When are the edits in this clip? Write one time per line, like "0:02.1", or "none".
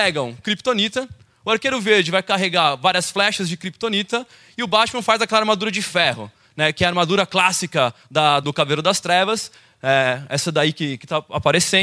0:08.4